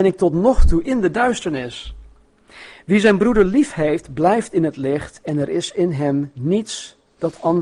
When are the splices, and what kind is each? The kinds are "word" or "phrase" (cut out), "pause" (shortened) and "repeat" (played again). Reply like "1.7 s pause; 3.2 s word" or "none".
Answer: none